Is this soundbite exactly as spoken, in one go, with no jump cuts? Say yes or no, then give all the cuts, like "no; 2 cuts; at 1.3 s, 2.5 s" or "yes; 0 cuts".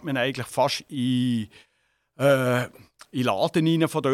yes; 0 cuts